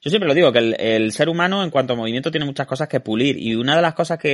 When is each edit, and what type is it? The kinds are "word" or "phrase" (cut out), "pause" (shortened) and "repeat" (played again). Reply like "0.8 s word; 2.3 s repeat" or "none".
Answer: none

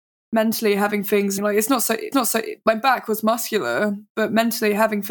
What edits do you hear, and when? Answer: 1.4 s word; 2.1 s repeat

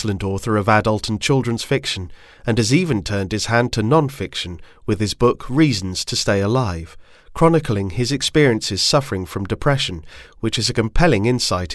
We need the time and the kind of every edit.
none

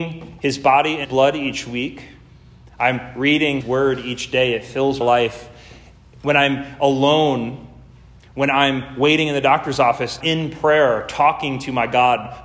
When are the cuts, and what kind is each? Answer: 1.0 s word; 3.6 s word; 5.0 s word; 10.2 s word

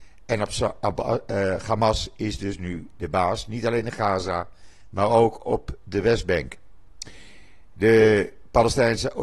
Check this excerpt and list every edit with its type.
none

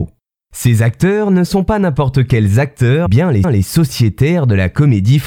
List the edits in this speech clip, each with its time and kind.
3.1 s word; 3.4 s repeat

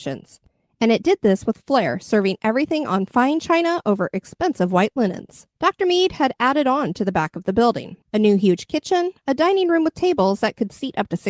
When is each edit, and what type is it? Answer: 5.6 s pause

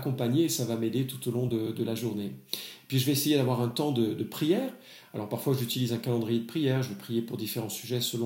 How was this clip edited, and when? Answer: none

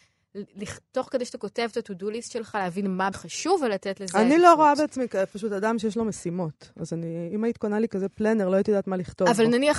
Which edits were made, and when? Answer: 3.1 s word

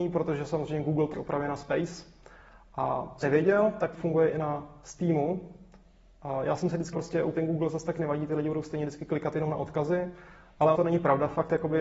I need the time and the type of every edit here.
1.1 s word; 3.2 s word; 3.9 s word; 6.9 s word; 7.3 s word; 10.7 s word

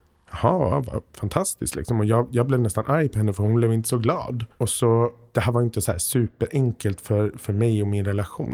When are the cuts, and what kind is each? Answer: 1.1 s pause; 4.5 s pause

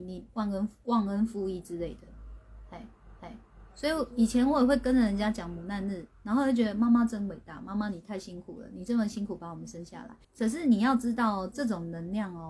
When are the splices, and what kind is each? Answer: 3.2 s repeat; 10.2 s pause

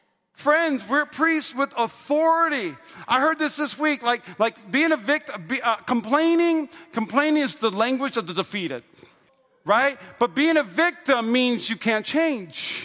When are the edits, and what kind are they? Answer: 9.3 s pause

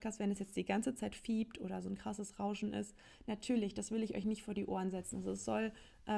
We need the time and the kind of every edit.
none

